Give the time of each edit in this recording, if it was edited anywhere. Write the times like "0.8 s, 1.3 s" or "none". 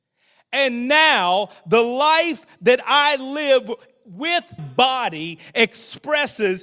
4.6 s